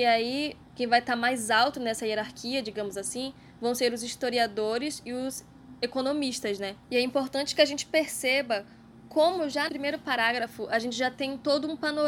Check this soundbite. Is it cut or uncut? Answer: cut